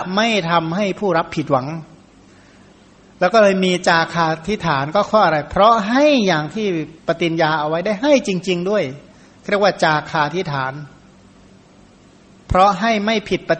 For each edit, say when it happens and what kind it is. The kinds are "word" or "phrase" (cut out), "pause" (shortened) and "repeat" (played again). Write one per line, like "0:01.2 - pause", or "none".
0:07.0 - pause

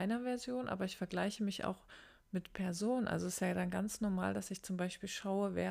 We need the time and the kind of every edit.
none

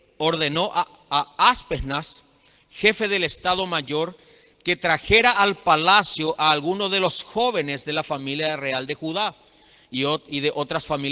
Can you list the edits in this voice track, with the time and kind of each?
none

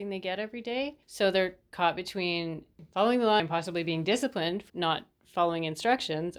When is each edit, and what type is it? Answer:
0:01.0 - pause
0:03.4 - phrase
0:04.7 - word

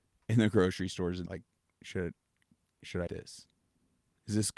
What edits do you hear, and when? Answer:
0:01.3 - phrase
0:03.1 - word

